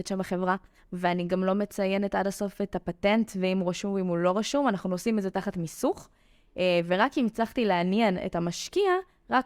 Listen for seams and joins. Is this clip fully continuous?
yes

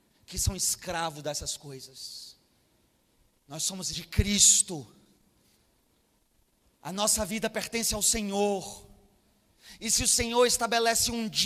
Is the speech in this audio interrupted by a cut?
yes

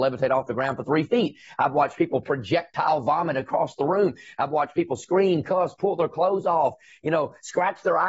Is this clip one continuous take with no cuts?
yes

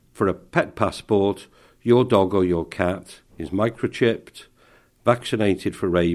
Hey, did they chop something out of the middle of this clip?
no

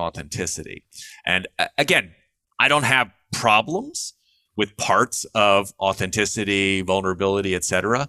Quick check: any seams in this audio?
no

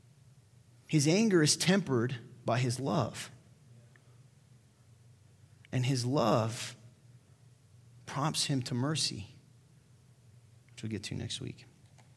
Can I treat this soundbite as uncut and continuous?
yes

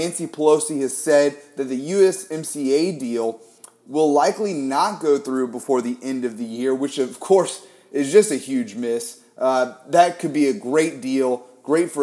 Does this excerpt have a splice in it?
no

